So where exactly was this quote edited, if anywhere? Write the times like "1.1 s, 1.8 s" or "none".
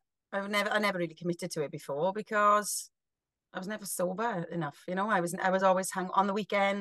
none